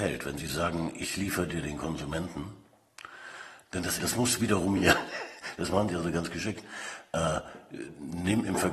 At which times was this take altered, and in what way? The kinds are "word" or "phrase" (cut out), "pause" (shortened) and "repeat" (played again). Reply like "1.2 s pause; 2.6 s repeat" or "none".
4.0 s word; 4.8 s phrase

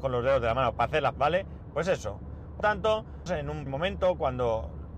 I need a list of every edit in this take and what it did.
1.1 s word; 2.6 s word; 3.3 s word; 3.7 s word

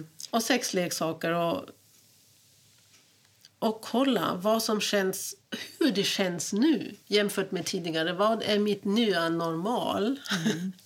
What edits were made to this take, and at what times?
none

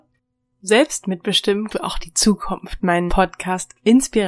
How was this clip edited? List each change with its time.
1.7 s word; 3.1 s word

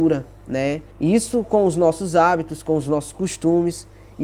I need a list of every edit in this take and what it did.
0.9 s pause

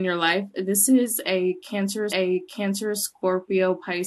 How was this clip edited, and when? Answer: 2.1 s repeat

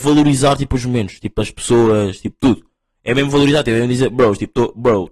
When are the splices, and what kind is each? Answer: none

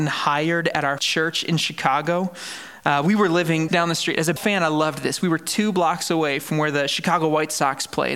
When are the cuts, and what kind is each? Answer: 1.0 s word; 3.7 s word; 4.4 s word

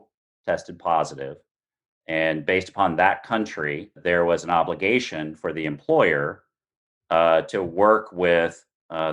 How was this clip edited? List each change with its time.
none

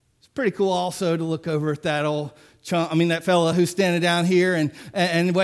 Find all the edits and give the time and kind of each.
none

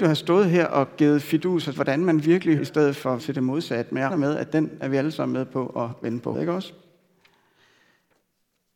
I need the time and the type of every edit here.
1.7 s word; 2.6 s word; 3.2 s word; 4.1 s word; 6.3 s word

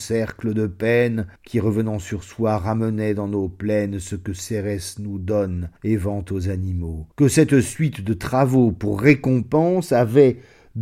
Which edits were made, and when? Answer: 1.4 s pause; 5.8 s pause; 7.1 s pause

